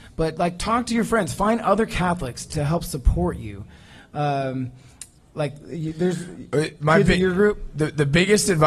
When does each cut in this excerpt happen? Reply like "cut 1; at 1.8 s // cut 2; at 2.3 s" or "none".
cut 1; at 2.5 s